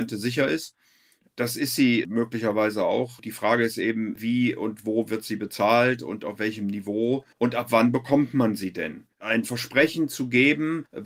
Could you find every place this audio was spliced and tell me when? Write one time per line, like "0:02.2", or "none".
0:07.3
0:09.1